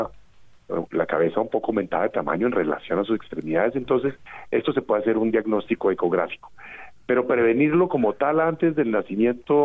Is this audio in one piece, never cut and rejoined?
yes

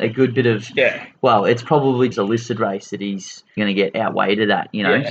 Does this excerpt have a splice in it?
yes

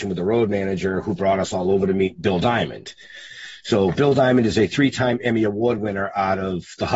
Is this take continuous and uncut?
yes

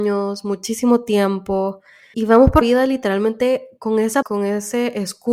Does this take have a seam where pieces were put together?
yes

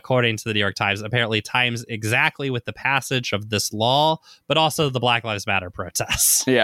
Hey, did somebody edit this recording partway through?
no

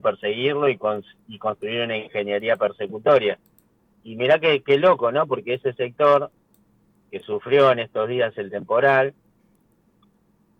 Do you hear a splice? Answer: no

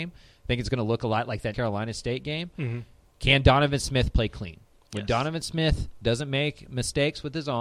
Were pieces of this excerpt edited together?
yes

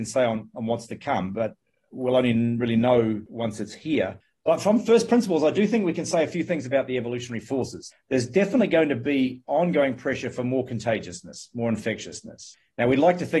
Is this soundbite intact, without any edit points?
yes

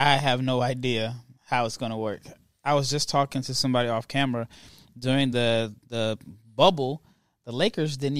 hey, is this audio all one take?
yes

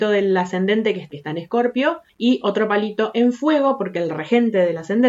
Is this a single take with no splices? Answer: no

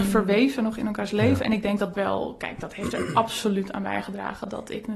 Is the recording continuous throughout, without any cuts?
no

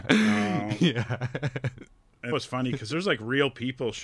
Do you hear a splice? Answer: yes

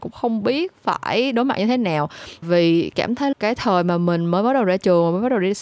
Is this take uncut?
no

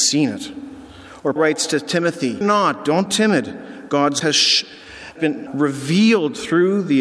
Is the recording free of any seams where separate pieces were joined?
no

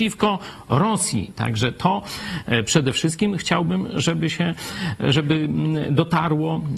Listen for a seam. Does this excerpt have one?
no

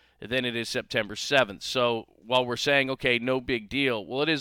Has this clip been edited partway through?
no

